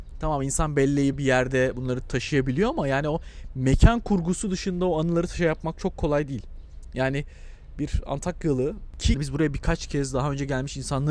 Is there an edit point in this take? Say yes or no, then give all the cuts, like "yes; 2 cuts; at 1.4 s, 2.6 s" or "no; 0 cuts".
yes; 2 cuts; at 1.1 s, 9.1 s